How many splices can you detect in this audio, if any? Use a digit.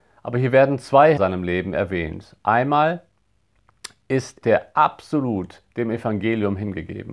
2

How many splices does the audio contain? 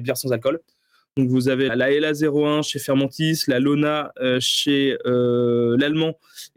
1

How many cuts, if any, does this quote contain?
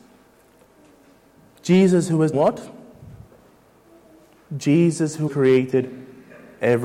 2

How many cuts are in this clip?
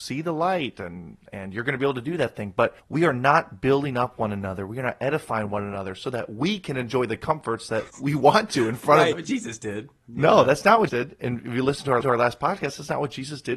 5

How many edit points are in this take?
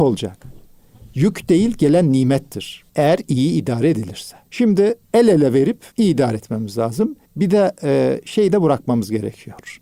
4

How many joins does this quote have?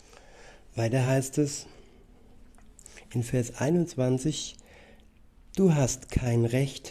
0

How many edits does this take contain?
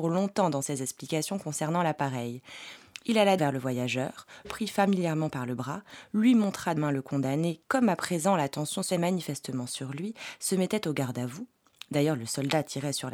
5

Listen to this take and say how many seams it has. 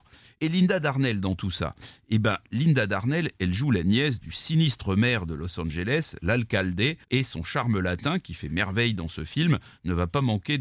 1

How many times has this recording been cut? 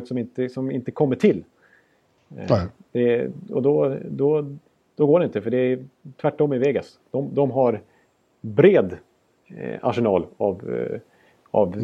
0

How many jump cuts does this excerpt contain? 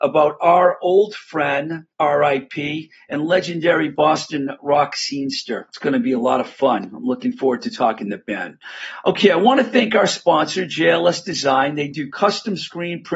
2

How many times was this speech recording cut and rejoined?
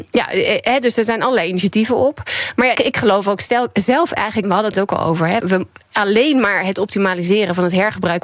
4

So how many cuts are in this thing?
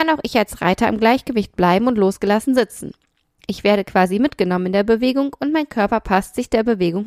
0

